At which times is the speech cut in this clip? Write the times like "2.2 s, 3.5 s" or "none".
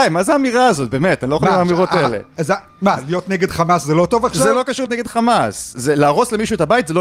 4.9 s